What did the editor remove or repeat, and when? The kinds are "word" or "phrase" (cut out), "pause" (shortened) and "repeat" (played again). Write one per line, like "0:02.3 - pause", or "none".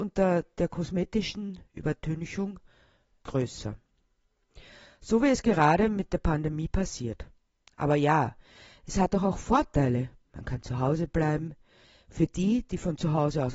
none

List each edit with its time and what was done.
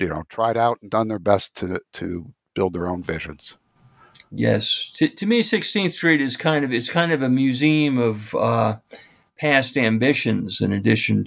none

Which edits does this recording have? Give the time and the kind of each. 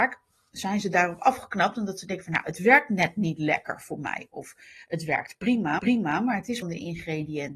0:05.8 - repeat
0:06.6 - phrase

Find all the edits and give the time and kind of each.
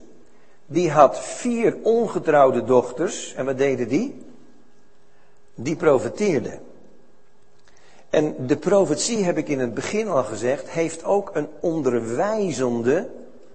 none

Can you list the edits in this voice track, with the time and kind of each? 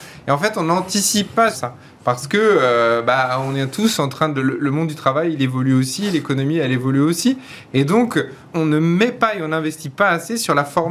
0:01.5 - word
0:08.5 - word

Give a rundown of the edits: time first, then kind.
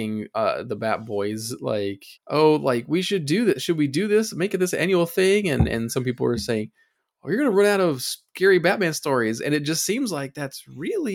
0:02.2 - pause

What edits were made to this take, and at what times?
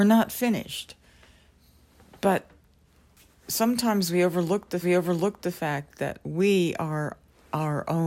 0:04.8 - repeat

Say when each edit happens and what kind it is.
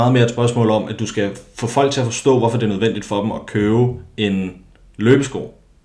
none

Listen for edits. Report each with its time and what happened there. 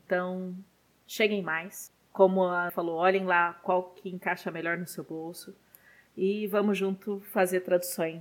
0:02.7 - word

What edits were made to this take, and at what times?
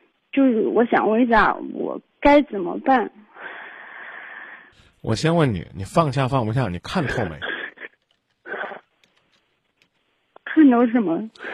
0:04.7 - pause

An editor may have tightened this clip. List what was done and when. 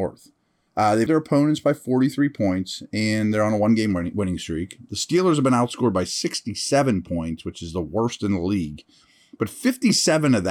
0:01.1 - word

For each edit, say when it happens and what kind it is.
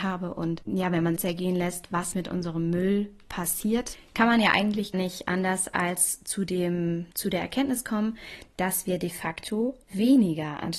0:01.2 - phrase
0:02.1 - word
0:04.9 - word
0:07.1 - pause
0:09.8 - pause

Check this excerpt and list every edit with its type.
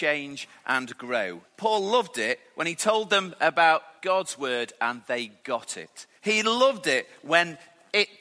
0:01.5 - pause
0:04.0 - pause
0:06.2 - pause

